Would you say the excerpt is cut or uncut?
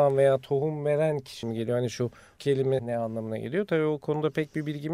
cut